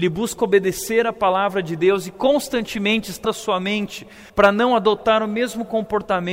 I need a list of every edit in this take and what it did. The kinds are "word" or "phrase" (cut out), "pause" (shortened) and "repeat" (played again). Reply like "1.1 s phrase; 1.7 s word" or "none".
3.2 s word; 4.3 s pause